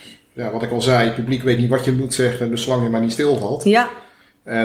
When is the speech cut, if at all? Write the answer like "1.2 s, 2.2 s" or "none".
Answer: none